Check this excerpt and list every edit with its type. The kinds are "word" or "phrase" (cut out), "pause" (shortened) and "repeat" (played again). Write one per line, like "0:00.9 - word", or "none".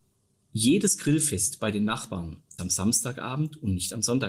0:02.6 - word